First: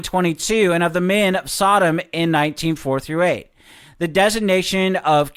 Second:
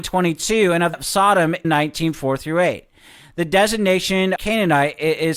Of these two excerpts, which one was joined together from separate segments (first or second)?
second